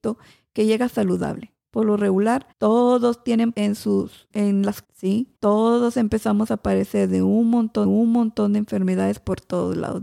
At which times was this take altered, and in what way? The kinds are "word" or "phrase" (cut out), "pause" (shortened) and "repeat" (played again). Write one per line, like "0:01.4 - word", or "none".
0:01.6 - pause
0:02.5 - pause
0:03.5 - word
0:04.3 - word
0:04.8 - word
0:05.3 - pause
0:07.8 - repeat